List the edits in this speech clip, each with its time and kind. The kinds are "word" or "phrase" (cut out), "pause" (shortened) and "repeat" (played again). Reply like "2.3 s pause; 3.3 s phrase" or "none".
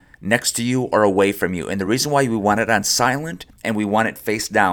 none